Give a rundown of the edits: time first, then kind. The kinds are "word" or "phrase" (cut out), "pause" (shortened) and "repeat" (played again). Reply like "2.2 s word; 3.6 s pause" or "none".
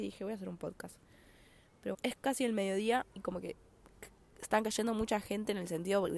1.9 s word